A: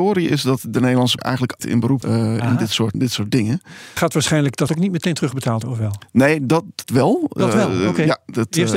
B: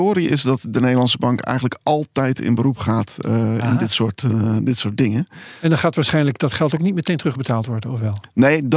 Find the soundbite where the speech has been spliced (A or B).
A